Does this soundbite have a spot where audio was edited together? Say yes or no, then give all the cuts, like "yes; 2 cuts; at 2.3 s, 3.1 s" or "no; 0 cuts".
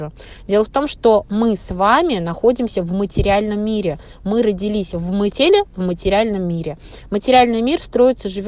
yes; 1 cut; at 5.3 s